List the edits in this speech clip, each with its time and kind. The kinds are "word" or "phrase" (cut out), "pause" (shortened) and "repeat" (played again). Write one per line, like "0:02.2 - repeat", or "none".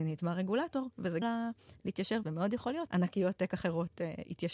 0:01.2 - word
0:02.2 - word
0:02.9 - word
0:03.4 - word